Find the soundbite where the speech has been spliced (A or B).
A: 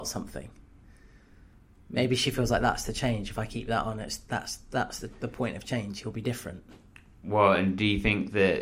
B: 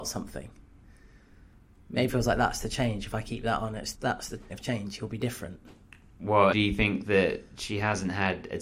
B